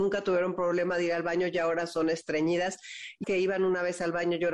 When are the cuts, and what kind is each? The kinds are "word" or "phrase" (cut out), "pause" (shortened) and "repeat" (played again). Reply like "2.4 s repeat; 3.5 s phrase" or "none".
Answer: 3.2 s word